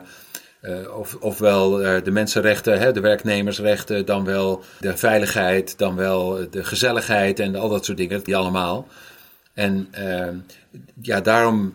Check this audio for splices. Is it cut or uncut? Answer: cut